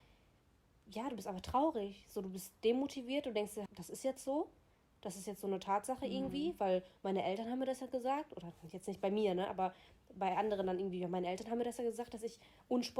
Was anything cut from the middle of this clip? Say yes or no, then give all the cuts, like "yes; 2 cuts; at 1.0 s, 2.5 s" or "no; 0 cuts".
yes; 1 cut; at 3.7 s